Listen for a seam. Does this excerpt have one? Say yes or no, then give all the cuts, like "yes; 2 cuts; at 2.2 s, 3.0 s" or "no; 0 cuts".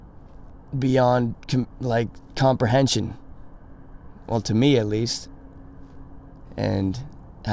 no; 0 cuts